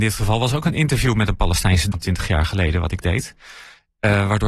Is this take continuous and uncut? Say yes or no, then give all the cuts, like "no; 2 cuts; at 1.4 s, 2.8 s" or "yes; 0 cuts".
no; 1 cut; at 1.9 s